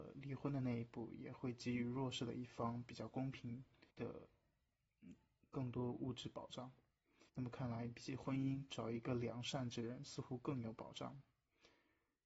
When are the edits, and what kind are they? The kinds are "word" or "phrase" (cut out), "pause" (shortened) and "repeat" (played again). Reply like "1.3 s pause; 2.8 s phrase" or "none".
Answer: 3.9 s pause; 7.3 s pause